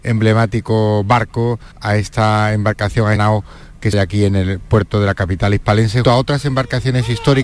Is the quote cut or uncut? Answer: cut